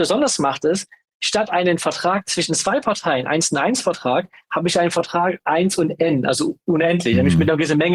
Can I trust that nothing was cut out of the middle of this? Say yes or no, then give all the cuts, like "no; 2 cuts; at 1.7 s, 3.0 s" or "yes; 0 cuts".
yes; 0 cuts